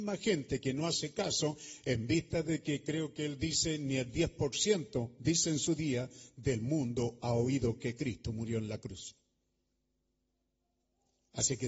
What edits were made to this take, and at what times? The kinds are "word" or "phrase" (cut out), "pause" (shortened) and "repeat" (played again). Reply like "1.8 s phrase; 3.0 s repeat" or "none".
none